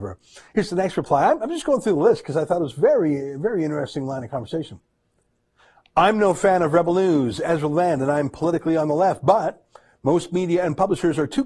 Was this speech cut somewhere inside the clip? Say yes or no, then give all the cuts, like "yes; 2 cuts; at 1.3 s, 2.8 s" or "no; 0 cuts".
no; 0 cuts